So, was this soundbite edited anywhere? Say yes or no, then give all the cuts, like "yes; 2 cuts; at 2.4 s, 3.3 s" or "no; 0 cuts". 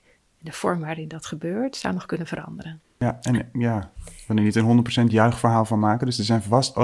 yes; 1 cut; at 2.8 s